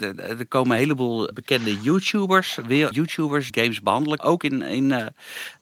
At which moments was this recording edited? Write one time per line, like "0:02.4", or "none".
0:01.3
0:02.9
0:03.5
0:04.2